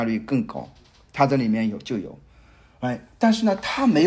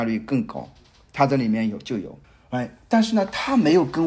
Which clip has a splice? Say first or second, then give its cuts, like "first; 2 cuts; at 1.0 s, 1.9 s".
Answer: second; 1 cut; at 2.2 s